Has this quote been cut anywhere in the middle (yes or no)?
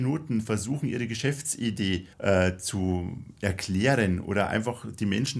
yes